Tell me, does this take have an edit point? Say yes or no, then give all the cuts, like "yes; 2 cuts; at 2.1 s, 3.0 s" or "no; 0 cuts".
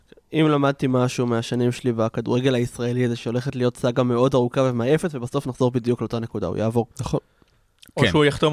yes; 1 cut; at 6.9 s